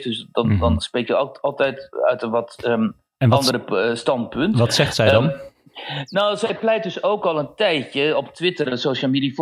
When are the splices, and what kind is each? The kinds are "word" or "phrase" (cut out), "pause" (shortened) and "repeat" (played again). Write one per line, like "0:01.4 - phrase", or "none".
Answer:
none